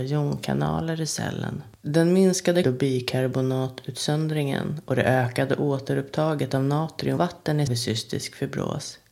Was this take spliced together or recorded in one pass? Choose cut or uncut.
cut